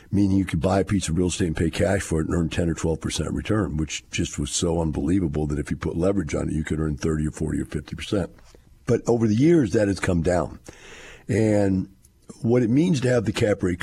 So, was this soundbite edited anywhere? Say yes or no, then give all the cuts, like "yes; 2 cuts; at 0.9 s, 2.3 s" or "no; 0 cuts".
no; 0 cuts